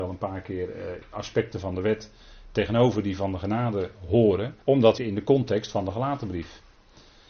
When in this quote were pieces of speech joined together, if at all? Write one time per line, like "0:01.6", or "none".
0:04.6
0:05.0